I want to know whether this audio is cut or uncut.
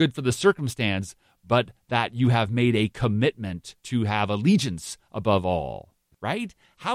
uncut